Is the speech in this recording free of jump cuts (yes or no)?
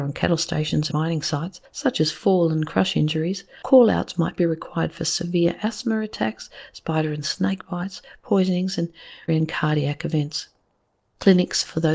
no